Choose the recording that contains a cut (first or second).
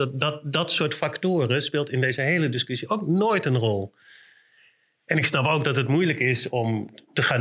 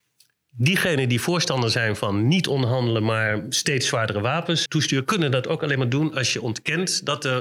second